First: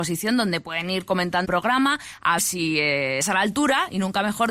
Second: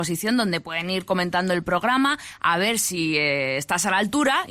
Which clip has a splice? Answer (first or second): first